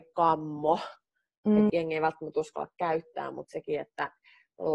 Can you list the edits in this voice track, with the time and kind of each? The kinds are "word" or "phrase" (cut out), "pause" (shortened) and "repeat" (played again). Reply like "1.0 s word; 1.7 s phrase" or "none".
1.7 s word